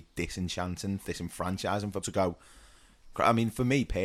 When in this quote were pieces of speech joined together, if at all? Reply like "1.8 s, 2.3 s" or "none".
1.0 s, 2.0 s